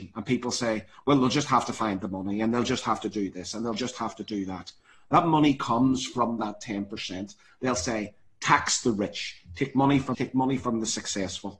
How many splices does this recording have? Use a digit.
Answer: 1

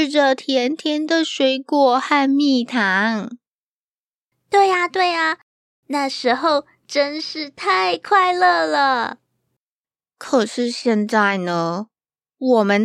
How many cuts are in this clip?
0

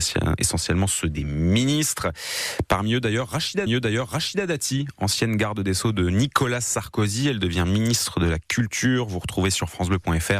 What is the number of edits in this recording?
1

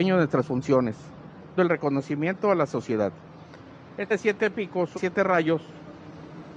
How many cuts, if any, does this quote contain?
3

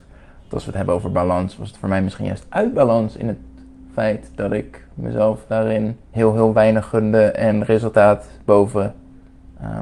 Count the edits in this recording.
1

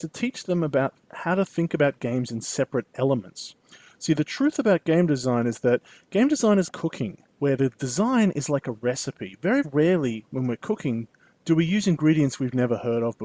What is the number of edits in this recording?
4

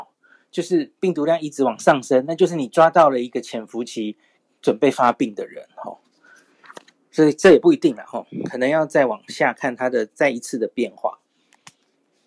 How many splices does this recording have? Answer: 0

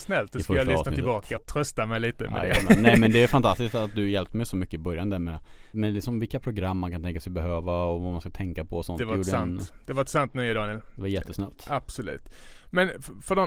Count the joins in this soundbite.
2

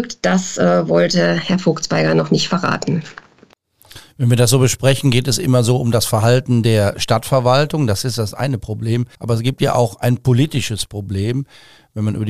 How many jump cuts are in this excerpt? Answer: 1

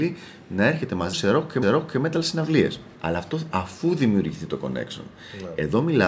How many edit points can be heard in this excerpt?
4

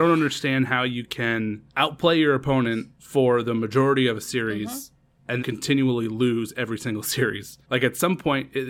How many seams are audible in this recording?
4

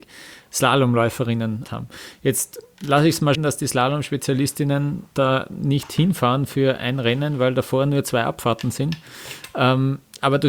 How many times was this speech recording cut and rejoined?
3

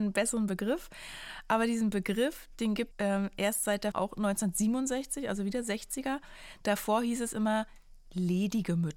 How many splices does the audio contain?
2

